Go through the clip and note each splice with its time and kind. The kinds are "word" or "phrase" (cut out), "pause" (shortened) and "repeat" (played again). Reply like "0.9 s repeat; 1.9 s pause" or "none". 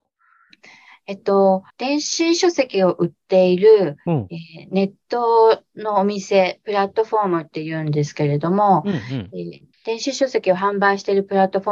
1.7 s pause